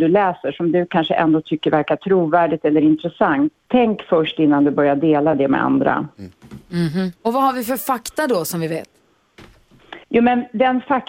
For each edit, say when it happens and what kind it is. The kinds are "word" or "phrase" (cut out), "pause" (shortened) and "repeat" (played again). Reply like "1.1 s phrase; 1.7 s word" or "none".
3.6 s pause; 7.2 s pause; 10.0 s pause